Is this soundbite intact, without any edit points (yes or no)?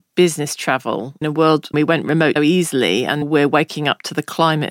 no